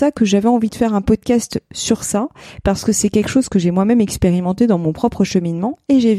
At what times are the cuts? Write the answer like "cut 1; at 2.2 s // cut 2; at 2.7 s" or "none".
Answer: none